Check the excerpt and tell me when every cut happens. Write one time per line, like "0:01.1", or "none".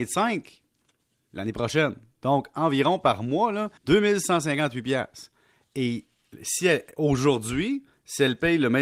0:03.8